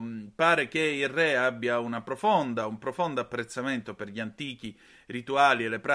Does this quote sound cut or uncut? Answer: uncut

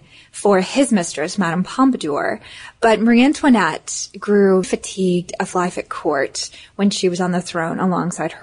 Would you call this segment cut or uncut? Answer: cut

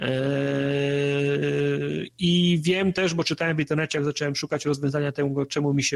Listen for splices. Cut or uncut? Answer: uncut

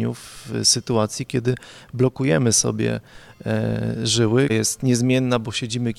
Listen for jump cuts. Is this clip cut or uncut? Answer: cut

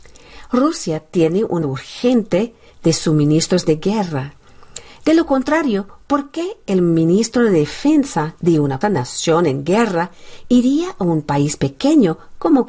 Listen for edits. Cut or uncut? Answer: cut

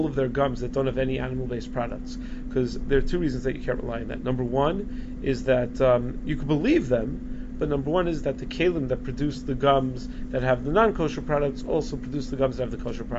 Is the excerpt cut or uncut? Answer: uncut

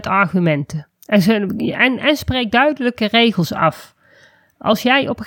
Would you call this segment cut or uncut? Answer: cut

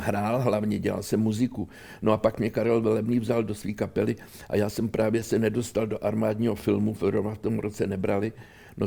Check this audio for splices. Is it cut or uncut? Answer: uncut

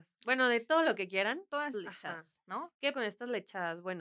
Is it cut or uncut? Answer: cut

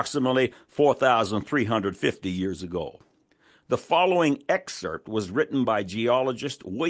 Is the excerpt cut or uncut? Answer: uncut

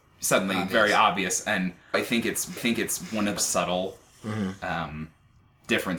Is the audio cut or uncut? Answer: cut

